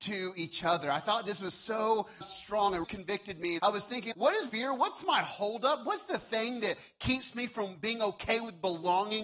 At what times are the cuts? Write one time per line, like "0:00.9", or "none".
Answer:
0:02.2
0:02.8
0:03.6
0:04.1
0:04.5